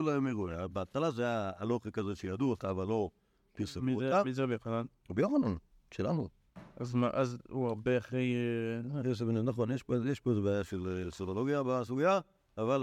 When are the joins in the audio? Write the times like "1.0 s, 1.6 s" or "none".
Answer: none